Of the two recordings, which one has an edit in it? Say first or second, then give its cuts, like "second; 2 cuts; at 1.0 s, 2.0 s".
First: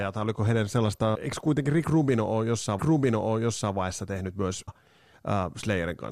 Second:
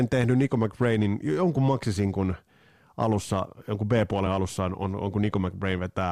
first; 3 cuts; at 1.1 s, 2.8 s, 4.7 s